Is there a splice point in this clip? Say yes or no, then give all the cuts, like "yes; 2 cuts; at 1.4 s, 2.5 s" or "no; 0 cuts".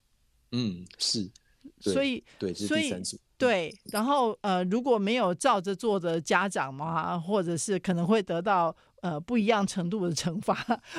no; 0 cuts